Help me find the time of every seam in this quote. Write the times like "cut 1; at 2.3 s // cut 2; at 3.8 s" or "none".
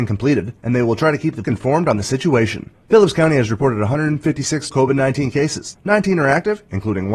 cut 1; at 1.4 s // cut 2; at 4.7 s